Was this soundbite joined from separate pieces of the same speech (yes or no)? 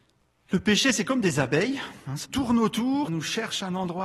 yes